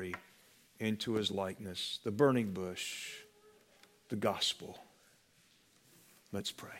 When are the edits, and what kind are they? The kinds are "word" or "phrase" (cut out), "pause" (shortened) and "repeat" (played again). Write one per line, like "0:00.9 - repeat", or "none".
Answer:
none